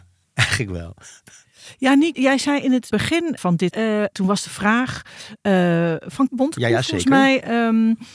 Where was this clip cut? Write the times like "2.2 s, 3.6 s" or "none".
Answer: 2.1 s, 2.9 s, 3.4 s, 3.7 s, 4.1 s, 6.3 s